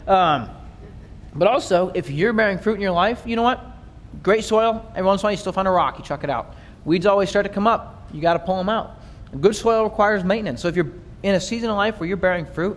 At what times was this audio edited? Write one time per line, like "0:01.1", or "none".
none